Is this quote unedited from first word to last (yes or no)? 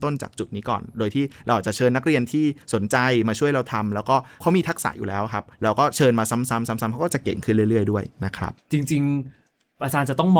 no